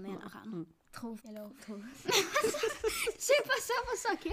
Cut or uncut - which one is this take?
cut